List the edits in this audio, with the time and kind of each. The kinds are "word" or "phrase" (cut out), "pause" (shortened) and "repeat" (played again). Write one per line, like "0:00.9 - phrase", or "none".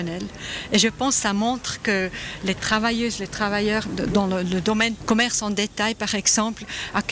0:05.0 - word